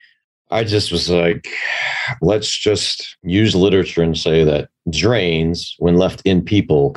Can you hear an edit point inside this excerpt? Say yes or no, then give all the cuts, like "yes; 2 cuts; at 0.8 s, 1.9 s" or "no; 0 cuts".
yes; 1 cut; at 3.2 s